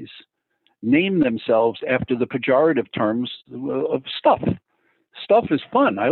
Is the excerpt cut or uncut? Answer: uncut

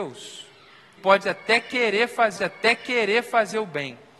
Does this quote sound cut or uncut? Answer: cut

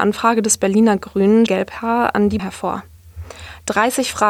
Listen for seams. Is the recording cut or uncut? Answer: cut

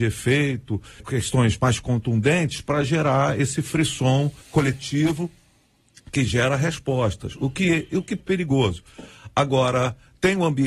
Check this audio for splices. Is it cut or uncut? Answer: cut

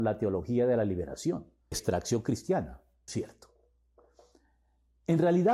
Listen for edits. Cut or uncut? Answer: cut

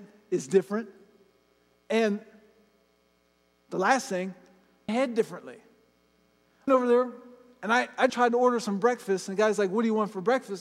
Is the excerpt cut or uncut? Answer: cut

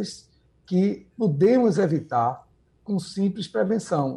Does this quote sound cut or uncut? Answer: uncut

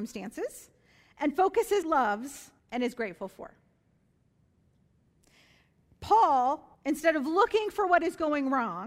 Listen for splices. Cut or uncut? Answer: cut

